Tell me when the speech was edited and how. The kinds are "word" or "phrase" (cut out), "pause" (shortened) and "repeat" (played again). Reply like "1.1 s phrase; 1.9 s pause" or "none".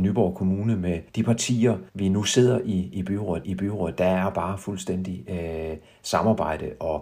1.1 s pause; 1.9 s pause; 3.4 s repeat

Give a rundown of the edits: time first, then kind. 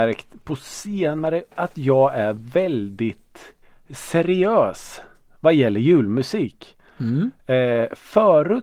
1.5 s word; 3.6 s pause

